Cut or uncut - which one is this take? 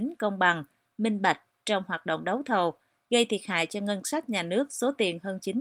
uncut